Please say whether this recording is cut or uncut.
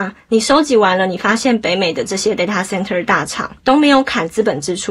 cut